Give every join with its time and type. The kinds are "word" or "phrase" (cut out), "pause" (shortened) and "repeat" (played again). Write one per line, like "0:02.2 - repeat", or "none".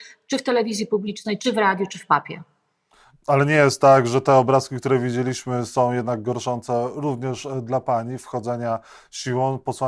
none